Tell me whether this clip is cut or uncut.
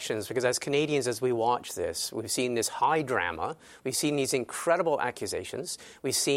uncut